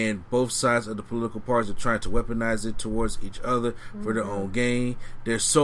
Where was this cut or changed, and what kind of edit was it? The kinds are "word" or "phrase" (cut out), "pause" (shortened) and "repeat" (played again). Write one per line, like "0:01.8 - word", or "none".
none